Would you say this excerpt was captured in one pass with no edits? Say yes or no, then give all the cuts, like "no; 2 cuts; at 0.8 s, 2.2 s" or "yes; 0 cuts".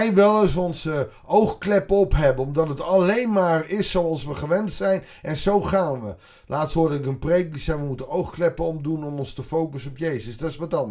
yes; 0 cuts